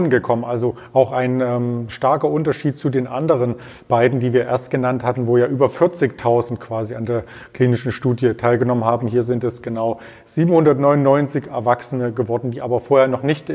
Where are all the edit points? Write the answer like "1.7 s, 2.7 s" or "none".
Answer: none